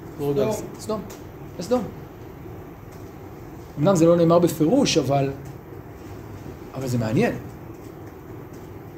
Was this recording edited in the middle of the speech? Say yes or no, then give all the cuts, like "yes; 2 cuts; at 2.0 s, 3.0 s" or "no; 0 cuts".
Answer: no; 0 cuts